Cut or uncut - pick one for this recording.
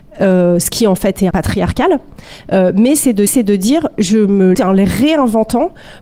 cut